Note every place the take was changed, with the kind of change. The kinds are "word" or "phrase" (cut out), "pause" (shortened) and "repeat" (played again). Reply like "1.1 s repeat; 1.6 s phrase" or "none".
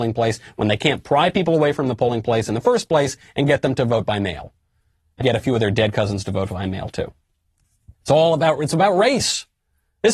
5.2 s word; 7.9 s pause